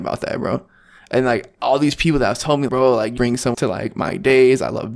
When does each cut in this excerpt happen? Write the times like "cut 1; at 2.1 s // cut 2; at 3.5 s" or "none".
cut 1; at 2.7 s // cut 2; at 3.2 s // cut 3; at 3.5 s